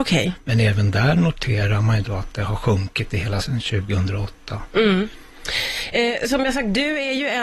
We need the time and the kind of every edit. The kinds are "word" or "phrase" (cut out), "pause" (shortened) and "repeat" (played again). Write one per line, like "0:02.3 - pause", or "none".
0:03.4 - word